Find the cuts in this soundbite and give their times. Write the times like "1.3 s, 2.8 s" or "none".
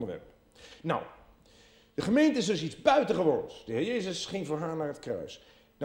none